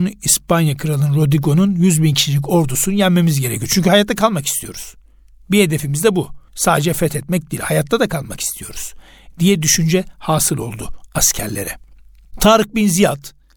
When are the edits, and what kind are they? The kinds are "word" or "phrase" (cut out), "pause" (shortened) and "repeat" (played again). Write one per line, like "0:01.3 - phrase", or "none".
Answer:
0:06.5 - pause